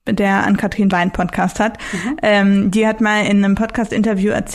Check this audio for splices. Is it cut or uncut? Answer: cut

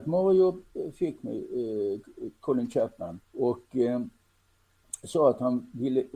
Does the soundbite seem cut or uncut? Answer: cut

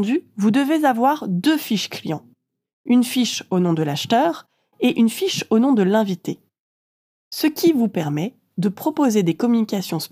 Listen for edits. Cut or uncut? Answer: uncut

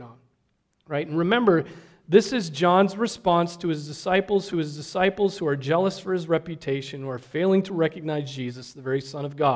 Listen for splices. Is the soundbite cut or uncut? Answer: cut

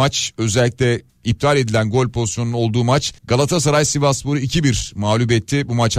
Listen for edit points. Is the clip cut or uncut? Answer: cut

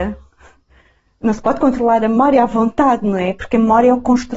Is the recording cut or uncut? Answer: uncut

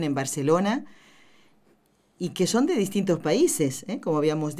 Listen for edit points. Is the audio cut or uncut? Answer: uncut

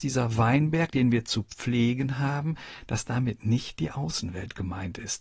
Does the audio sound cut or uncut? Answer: uncut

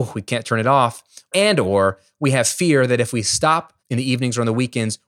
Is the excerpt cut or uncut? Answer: cut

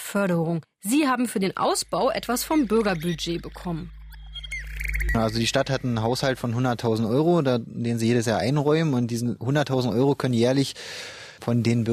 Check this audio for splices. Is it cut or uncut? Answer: uncut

